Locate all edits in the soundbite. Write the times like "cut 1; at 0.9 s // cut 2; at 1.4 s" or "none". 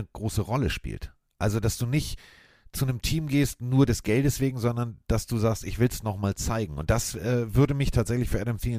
none